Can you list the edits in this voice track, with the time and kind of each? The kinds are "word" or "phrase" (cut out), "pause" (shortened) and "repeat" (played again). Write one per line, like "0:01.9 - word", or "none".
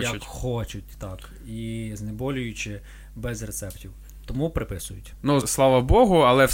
0:05.4 - word